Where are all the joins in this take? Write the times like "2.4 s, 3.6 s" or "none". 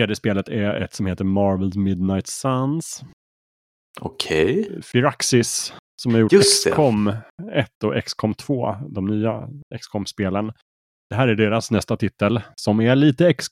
none